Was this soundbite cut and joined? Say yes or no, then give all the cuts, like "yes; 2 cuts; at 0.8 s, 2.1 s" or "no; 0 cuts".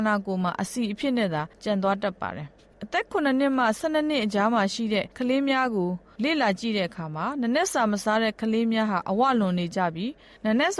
yes; 2 cuts; at 1.5 s, 5.1 s